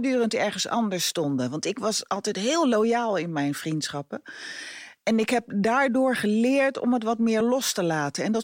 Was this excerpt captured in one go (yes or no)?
yes